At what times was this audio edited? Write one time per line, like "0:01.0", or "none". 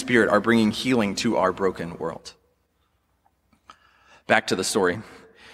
none